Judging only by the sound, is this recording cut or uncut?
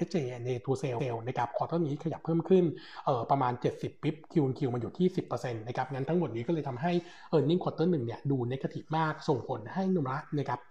cut